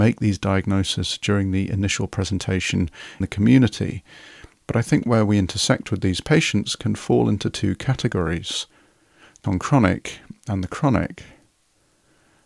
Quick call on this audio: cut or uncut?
cut